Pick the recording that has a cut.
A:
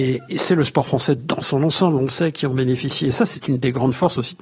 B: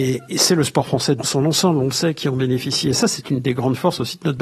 B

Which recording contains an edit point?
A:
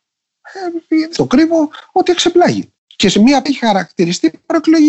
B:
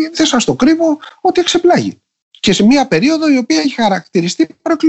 A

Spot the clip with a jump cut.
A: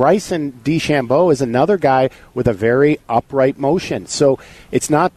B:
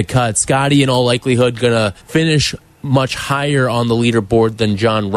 B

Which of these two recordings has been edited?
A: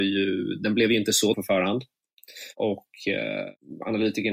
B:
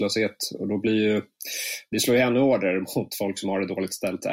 A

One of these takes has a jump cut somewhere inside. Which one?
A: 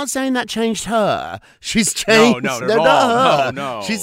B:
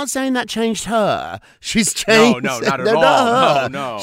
A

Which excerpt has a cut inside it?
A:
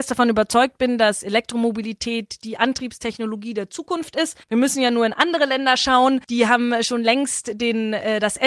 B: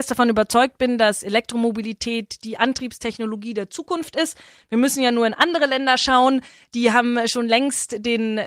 A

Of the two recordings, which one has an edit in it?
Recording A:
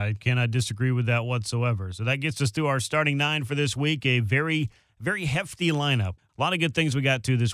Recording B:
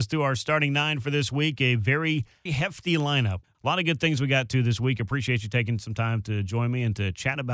B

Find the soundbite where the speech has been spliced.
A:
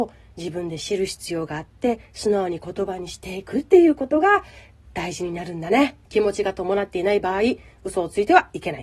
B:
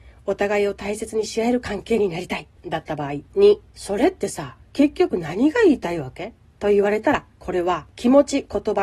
B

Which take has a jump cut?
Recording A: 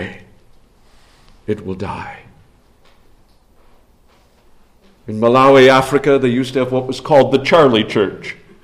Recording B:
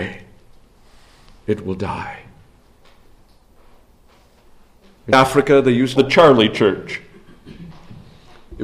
B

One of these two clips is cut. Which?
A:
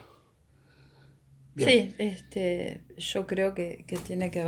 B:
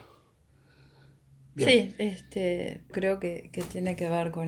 B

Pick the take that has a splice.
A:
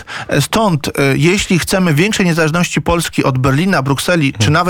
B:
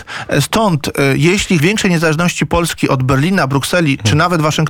B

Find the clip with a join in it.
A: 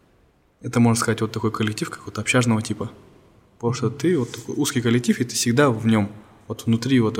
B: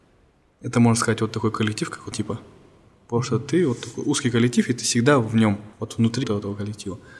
B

